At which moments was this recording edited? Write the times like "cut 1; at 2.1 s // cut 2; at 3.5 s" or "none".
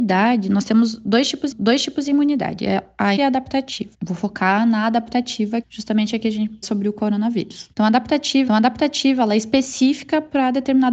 cut 1; at 1.5 s // cut 2; at 3.2 s // cut 3; at 3.9 s // cut 4; at 5.6 s // cut 5; at 6.6 s // cut 6; at 7.7 s // cut 7; at 8.5 s